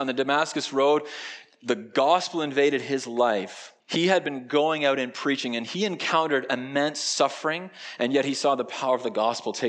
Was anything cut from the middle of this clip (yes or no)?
yes